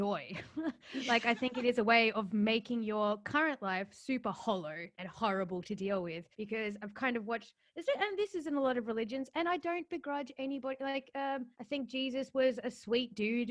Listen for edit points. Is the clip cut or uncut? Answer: cut